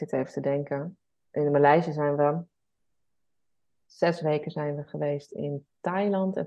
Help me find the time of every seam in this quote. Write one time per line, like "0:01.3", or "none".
none